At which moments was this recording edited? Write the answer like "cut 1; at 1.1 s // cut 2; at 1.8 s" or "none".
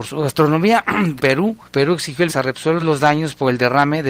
cut 1; at 1.2 s // cut 2; at 1.7 s // cut 3; at 2.3 s // cut 4; at 2.8 s